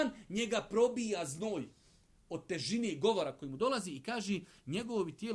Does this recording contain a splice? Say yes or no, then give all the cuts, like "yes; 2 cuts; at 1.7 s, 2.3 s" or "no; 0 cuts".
no; 0 cuts